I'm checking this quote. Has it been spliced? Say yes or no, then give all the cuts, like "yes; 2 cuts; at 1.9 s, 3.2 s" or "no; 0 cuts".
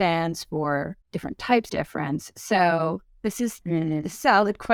yes; 3 cuts; at 1.0 s, 1.7 s, 3.6 s